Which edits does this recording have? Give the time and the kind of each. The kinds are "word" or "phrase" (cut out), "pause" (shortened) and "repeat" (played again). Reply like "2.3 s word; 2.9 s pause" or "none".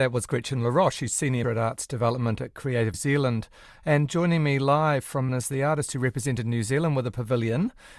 1.4 s word; 2.9 s word; 5.3 s word